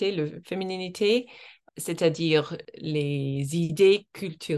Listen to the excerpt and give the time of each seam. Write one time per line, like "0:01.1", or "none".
none